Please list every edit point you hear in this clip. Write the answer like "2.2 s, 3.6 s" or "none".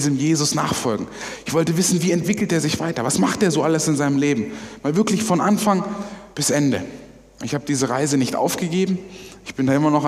6.3 s